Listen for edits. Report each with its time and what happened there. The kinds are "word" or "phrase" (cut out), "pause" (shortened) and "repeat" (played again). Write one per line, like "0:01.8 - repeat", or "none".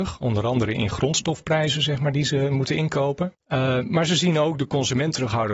0:03.4 - pause